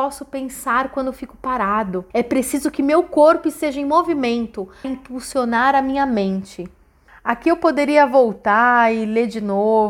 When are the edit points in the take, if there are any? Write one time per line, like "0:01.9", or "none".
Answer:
0:02.1
0:04.8